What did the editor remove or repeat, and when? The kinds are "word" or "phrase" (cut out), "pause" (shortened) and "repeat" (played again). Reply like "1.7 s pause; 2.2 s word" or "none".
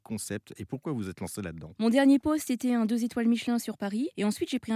none